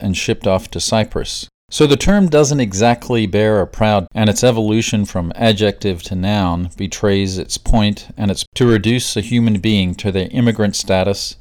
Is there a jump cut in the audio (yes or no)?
yes